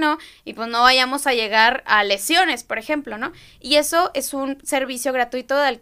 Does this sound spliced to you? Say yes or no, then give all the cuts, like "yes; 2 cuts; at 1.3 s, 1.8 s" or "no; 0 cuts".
no; 0 cuts